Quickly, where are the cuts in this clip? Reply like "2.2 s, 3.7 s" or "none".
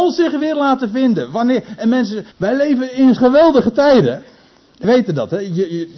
2.3 s, 3.2 s, 4.8 s